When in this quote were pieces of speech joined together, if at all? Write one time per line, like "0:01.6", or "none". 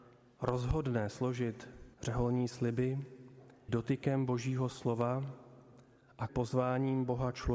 0:01.9
0:03.7
0:06.3